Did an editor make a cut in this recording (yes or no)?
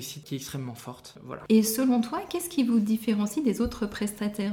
no